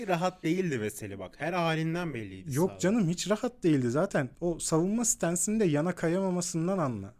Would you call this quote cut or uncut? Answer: cut